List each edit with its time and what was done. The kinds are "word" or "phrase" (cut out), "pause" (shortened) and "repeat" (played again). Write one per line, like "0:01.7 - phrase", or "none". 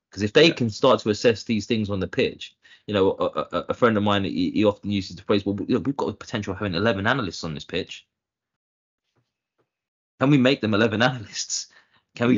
none